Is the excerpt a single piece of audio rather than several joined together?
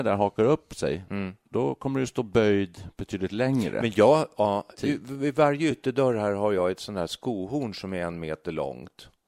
yes; 0 cuts

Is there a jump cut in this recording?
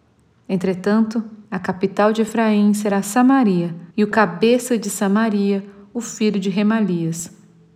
yes; 2 cuts; at 1.4 s, 3.9 s

